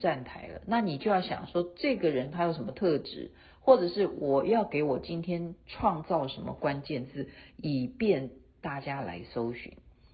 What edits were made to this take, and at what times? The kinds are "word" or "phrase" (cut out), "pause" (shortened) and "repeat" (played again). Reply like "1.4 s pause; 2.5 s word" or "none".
none